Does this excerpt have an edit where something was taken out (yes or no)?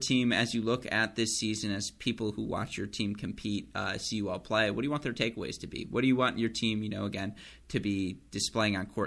no